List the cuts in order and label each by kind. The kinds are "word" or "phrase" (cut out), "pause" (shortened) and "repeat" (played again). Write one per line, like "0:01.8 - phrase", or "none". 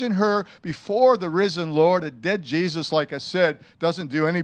none